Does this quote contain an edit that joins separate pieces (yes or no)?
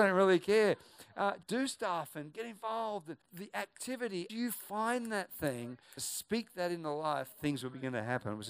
yes